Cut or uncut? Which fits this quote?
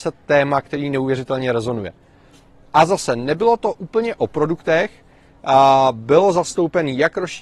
uncut